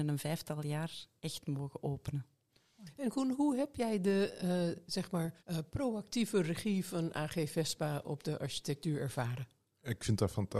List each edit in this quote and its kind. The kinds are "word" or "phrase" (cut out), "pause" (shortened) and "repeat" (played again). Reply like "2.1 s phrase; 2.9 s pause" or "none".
5.4 s pause